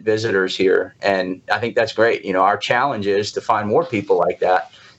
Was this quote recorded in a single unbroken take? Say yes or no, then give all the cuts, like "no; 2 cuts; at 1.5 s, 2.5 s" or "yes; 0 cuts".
yes; 0 cuts